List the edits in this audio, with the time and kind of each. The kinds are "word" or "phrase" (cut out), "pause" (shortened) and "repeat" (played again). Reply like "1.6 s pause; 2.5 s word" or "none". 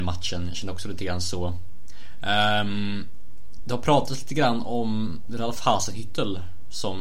none